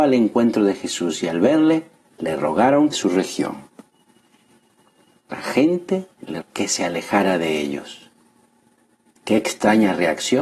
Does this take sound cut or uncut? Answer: cut